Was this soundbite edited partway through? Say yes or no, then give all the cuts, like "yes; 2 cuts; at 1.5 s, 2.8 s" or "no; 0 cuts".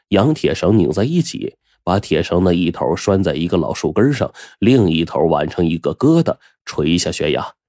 no; 0 cuts